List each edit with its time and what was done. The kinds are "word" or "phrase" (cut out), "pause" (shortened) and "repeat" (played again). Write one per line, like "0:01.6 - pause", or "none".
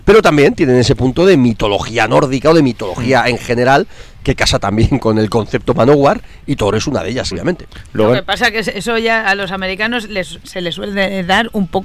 0:05.0 - word
0:07.3 - word